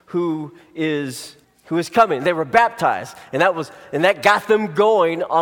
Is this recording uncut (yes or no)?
no